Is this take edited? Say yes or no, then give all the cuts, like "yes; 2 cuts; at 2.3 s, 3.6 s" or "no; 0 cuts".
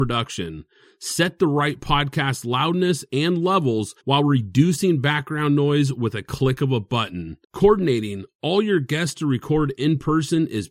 yes; 2 cuts; at 4.0 s, 7.4 s